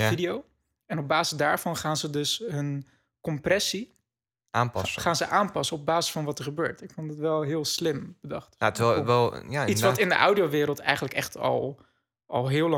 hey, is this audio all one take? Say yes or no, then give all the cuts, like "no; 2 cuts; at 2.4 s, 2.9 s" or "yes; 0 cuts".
yes; 0 cuts